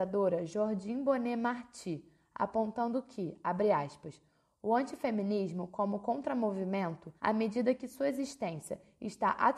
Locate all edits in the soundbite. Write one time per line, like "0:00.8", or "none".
0:07.2

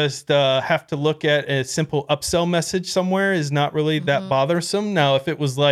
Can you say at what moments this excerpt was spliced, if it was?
none

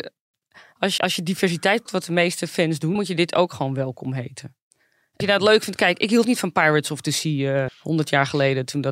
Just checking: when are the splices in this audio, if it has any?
0:01.0
0:01.9
0:03.0
0:05.2
0:06.2
0:07.7

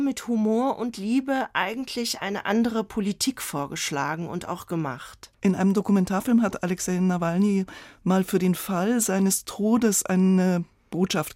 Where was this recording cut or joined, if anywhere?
0:05.3

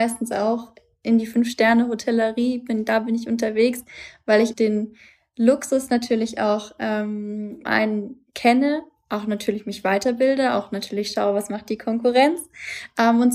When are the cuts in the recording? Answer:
0:04.5
0:07.6

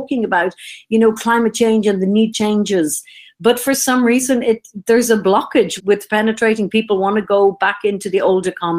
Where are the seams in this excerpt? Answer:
0:02.3
0:05.8

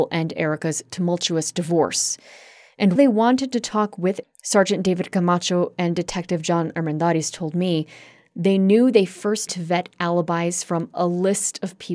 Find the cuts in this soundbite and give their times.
0:03.0
0:04.2
0:09.5

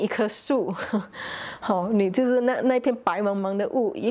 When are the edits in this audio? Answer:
none

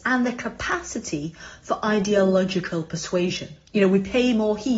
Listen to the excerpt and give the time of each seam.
0:03.7

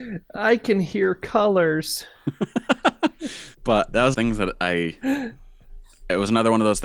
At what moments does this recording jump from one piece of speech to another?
0:03.5
0:04.1

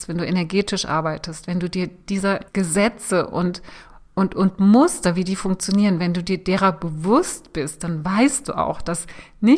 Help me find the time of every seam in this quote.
0:02.5

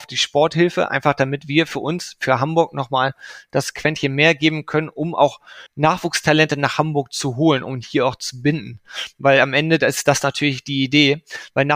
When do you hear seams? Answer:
0:05.7

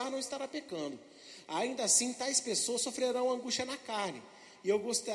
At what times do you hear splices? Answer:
none

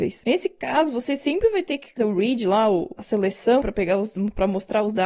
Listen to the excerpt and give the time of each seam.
0:02.0
0:03.0
0:03.6

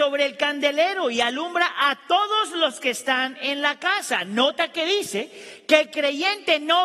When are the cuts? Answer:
none

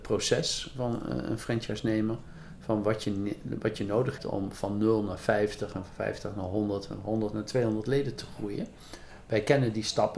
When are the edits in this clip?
0:04.2

